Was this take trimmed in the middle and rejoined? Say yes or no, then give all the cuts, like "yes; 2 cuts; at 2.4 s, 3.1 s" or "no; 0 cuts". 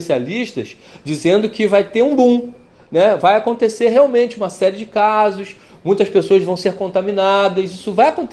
no; 0 cuts